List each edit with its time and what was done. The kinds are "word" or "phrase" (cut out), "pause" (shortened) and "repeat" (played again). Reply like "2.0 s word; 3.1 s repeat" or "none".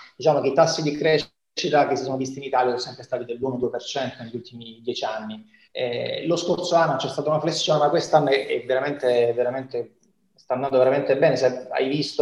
none